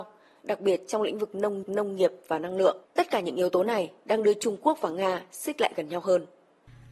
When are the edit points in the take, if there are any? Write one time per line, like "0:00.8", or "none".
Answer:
0:01.6
0:02.8